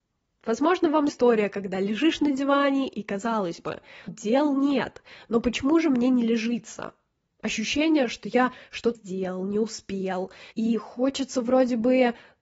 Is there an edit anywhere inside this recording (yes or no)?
yes